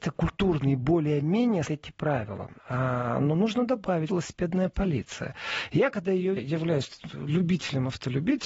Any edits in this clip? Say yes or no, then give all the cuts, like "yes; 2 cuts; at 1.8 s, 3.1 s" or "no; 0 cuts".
yes; 4 cuts; at 1.7 s, 2.6 s, 4.1 s, 6.4 s